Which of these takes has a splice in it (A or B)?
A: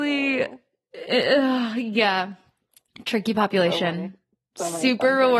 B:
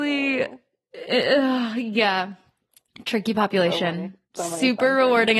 B